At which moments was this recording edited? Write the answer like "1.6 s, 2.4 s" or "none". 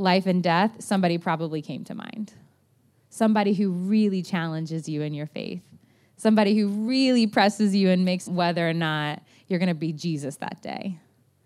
8.3 s